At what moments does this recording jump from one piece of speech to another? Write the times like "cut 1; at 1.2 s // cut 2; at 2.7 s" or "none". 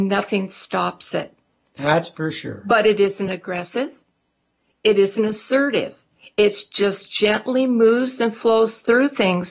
none